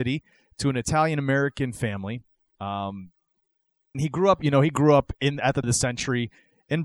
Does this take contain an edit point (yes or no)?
yes